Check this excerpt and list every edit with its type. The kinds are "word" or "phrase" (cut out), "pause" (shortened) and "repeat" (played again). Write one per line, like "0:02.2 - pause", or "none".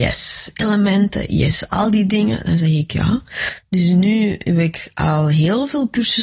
none